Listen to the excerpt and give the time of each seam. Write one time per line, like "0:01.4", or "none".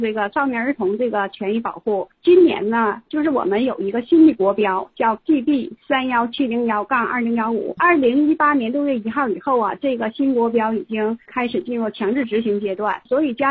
none